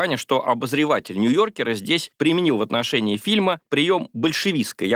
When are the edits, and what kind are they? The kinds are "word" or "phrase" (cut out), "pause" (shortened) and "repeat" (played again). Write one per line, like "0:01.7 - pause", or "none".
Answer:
none